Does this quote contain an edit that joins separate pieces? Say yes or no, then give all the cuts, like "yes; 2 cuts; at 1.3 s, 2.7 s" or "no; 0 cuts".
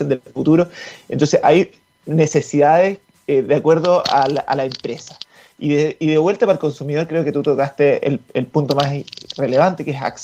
no; 0 cuts